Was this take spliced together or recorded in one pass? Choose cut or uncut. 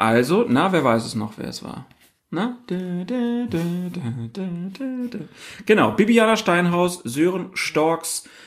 uncut